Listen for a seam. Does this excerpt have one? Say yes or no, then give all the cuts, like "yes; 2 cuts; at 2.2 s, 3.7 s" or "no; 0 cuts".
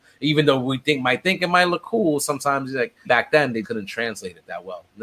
yes; 2 cuts; at 3.1 s, 3.6 s